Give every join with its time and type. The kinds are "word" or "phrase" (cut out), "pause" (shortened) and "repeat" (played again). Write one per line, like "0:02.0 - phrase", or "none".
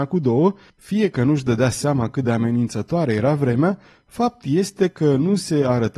none

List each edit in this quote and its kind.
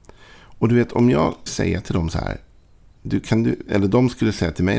0:01.5 - word

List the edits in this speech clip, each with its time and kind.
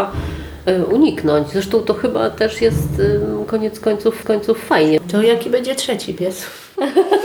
0:04.2 - repeat

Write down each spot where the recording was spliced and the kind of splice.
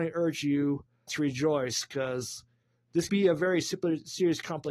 0:01.1 - word
0:03.1 - word

